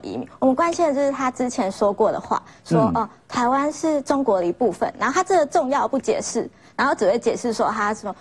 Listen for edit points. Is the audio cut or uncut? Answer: uncut